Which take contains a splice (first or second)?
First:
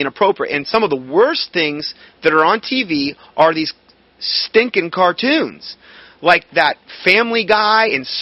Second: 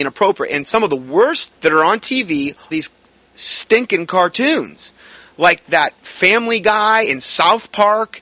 second